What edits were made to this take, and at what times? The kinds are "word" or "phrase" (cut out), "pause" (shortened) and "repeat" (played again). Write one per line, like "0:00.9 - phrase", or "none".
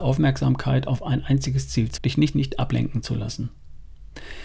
0:02.0 - word
0:02.3 - phrase